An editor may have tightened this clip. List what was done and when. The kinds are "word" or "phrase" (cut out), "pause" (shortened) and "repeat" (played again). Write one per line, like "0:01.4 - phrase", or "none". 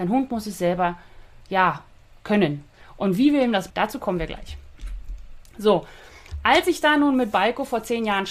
0:03.7 - word